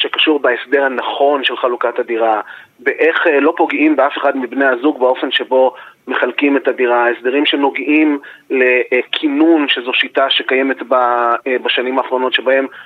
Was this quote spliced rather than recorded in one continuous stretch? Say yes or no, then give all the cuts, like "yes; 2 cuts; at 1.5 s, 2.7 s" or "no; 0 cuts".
no; 0 cuts